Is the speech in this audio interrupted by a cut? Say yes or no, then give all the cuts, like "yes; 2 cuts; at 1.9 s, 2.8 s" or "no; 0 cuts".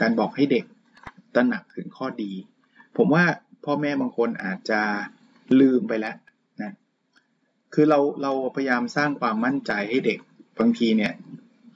no; 0 cuts